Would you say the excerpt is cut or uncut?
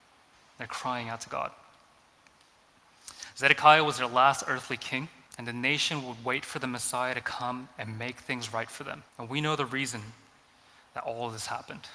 cut